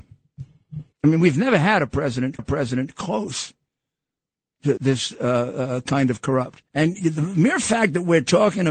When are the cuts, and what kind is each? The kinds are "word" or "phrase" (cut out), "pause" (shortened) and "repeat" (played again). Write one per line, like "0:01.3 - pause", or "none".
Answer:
0:00.9 - pause
0:02.4 - repeat
0:04.8 - word
0:06.7 - pause